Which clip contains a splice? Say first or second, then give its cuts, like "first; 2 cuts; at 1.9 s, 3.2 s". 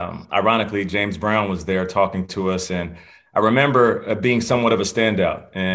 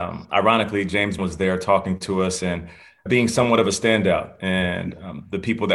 second; 2 cuts; at 1.2 s, 3.1 s